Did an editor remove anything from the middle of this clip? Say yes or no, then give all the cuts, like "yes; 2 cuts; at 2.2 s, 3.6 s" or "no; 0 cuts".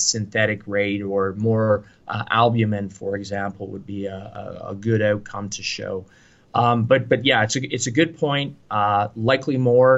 no; 0 cuts